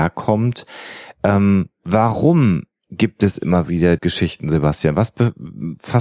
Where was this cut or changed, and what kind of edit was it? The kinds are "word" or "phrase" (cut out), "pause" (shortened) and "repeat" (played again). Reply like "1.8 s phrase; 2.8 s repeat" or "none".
4.0 s word